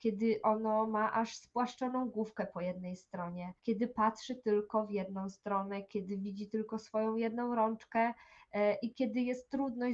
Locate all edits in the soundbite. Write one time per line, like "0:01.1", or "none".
0:03.6